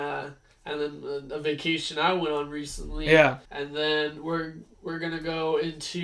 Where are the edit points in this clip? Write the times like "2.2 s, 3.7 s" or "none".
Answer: 3.4 s, 4.7 s